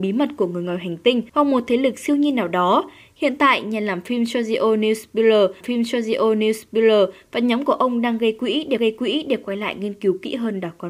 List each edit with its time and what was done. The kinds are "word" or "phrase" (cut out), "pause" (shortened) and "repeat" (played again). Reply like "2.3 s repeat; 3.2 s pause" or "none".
1.3 s pause; 5.6 s repeat; 8.8 s repeat